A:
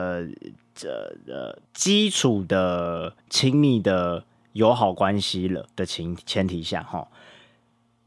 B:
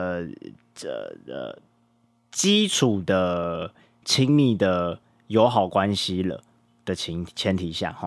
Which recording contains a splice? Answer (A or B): A